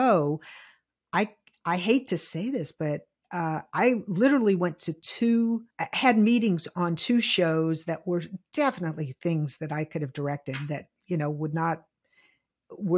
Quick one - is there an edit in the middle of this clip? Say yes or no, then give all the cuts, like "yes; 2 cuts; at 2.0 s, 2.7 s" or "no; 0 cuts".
yes; 1 cut; at 5.7 s